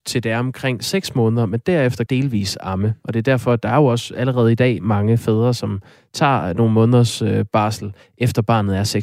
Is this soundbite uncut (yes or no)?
no